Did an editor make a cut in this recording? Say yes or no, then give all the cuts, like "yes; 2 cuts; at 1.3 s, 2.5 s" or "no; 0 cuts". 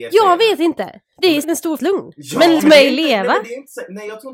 yes; 3 cuts; at 1.4 s, 1.8 s, 2.6 s